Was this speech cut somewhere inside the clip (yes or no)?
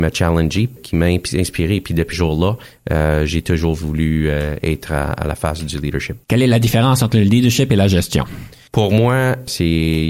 yes